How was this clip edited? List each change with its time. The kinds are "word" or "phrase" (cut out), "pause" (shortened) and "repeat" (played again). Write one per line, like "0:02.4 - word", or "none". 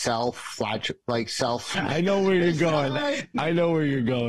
none